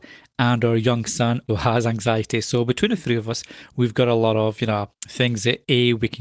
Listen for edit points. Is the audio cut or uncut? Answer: cut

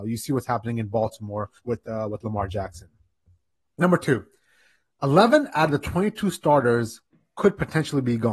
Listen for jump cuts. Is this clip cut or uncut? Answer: cut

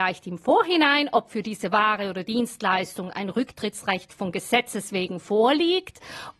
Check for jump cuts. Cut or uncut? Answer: uncut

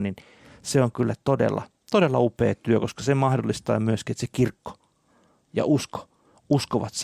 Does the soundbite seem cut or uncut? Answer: uncut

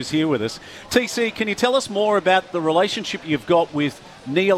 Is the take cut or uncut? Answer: uncut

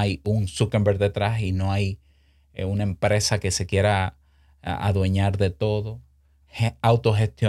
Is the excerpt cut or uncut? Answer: uncut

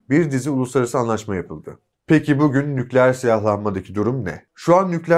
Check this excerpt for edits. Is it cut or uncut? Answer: uncut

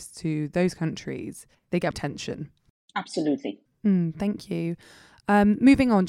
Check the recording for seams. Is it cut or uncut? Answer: cut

